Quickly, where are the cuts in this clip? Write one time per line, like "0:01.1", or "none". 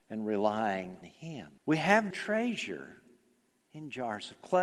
0:01.0
0:01.6
0:02.1